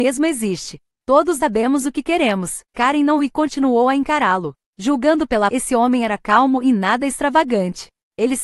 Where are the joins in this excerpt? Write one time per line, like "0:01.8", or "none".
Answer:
0:01.4
0:02.6
0:03.2
0:05.5